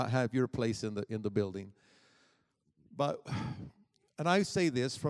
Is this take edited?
no; 0 cuts

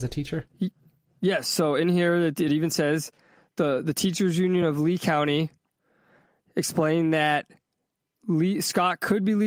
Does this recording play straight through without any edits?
yes; 0 cuts

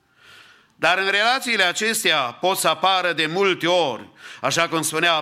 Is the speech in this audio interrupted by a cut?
no; 0 cuts

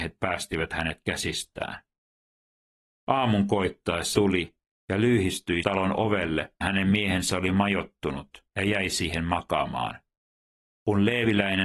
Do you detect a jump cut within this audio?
yes; 3 cuts; at 4.1 s, 5.6 s, 6.6 s

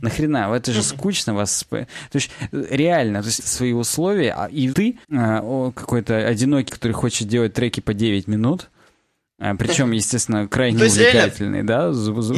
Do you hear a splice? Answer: yes; 4 cuts; at 3.4 s, 4.7 s, 5.0 s, 6.7 s

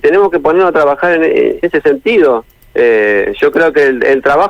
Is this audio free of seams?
no; 1 cut; at 1.6 s

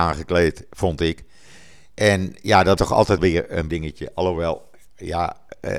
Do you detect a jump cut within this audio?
yes; 3 cuts; at 2.8 s, 3.2 s, 3.7 s

